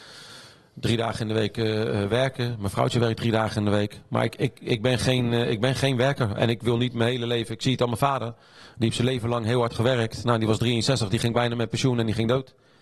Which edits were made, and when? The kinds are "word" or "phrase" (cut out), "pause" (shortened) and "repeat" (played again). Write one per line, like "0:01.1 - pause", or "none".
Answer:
none